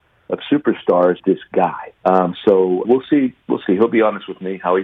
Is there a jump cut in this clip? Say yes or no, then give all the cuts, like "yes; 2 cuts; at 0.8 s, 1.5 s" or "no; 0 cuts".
yes; 3 cuts; at 1.2 s, 1.9 s, 2.8 s